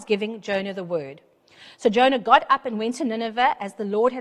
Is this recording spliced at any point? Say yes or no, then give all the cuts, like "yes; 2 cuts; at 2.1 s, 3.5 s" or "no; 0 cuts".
no; 0 cuts